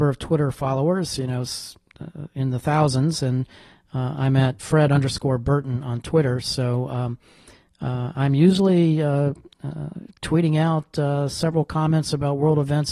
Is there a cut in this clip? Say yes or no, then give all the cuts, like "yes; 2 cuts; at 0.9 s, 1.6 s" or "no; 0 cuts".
yes; 1 cut; at 4.6 s